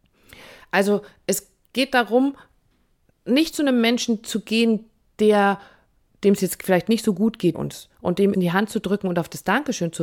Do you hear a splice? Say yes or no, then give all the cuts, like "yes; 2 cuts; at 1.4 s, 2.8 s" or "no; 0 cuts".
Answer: yes; 2 cuts; at 7.5 s, 8.3 s